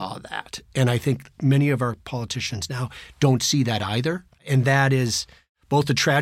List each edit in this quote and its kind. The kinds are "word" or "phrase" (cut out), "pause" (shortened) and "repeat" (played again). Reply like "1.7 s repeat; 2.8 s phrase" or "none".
4.4 s pause

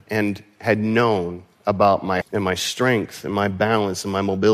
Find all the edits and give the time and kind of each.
2.2 s word

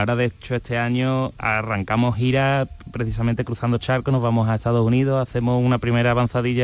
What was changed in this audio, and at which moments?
none

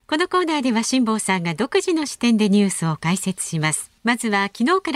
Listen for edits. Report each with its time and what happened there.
4.0 s pause

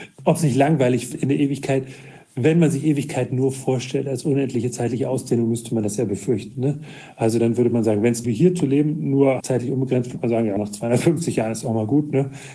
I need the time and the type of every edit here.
1.1 s word; 8.2 s phrase; 9.4 s word; 10.6 s word

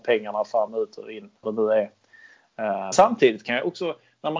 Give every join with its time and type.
1.4 s word; 2.9 s word

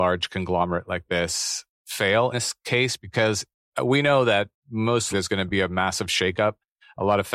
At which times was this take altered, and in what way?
2.3 s word; 5.1 s word

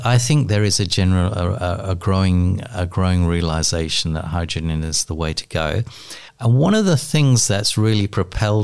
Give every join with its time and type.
6.3 s pause

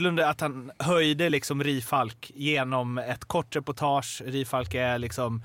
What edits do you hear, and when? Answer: none

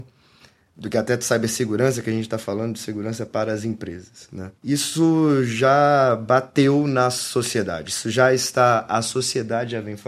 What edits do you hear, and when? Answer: 4.6 s pause

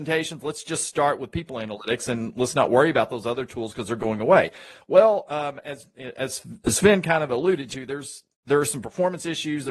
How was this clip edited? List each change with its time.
none

